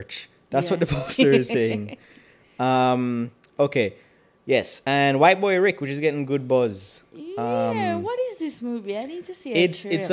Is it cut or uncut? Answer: uncut